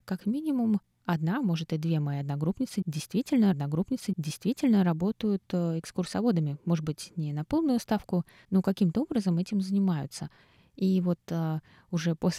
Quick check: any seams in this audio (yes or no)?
yes